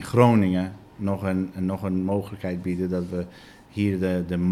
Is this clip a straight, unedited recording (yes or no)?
yes